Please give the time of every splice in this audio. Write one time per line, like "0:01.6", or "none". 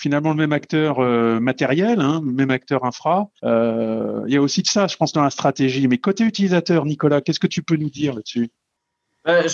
0:03.4